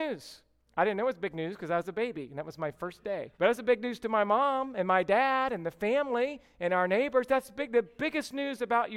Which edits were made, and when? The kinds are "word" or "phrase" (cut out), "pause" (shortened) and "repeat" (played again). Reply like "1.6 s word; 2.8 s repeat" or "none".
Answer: 3.3 s pause